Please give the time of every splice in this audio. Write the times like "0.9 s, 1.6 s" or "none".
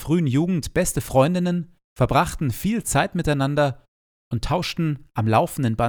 1.8 s